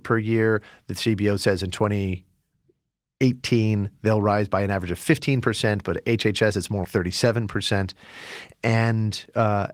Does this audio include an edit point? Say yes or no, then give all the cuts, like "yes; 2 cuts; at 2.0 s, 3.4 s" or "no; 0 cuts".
yes; 2 cuts; at 6.5 s, 6.8 s